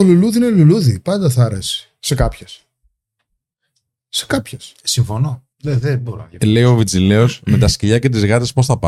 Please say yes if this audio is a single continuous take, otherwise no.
no